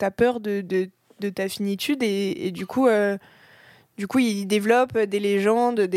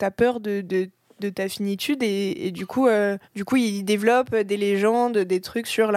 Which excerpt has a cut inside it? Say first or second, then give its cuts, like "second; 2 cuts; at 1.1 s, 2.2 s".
second; 1 cut; at 3.2 s